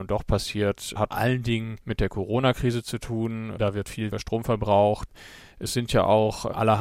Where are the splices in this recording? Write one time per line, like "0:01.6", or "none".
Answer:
0:01.1
0:01.8
0:04.1